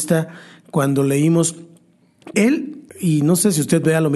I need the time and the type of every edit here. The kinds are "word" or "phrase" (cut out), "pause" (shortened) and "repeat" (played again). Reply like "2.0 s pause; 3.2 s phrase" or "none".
2.3 s word; 2.9 s pause